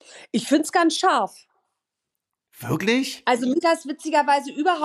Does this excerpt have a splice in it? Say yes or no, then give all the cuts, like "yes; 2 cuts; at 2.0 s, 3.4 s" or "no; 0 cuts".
yes; 1 cut; at 3.6 s